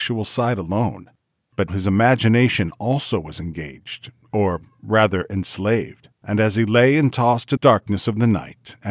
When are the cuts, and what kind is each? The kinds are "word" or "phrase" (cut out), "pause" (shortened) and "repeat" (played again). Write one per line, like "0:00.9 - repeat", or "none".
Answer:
0:01.7 - word
0:06.1 - pause
0:07.6 - phrase